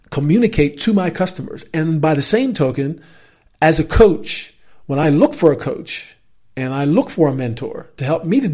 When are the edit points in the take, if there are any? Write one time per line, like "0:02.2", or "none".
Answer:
none